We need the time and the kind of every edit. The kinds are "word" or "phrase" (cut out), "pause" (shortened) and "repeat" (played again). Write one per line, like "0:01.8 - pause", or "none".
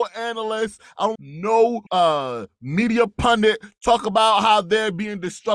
0:01.2 - phrase
0:01.9 - pause